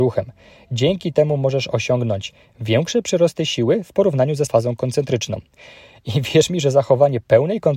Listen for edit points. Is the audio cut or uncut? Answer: cut